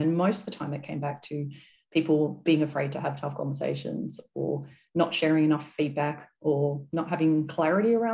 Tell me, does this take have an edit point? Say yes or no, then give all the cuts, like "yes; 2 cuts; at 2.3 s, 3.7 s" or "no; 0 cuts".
no; 0 cuts